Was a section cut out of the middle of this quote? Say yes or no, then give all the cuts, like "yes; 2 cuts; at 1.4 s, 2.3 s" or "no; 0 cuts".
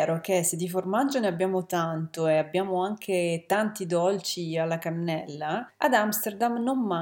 no; 0 cuts